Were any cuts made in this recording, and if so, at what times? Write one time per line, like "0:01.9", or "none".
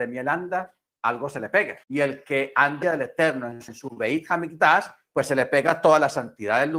0:01.8
0:02.8
0:03.7